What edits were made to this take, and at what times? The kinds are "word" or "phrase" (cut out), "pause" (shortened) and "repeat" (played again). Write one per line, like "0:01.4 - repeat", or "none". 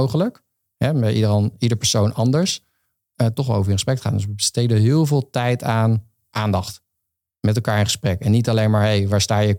none